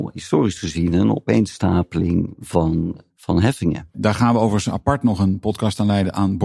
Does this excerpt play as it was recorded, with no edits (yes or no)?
yes